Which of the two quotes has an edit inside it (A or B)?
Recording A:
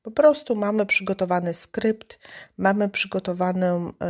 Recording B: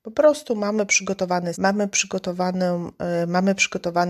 B